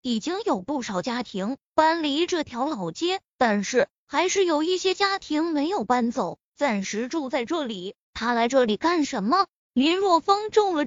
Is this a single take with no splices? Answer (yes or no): no